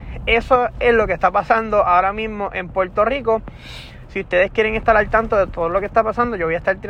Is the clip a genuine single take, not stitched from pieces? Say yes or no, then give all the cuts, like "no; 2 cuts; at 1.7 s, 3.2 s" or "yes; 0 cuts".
yes; 0 cuts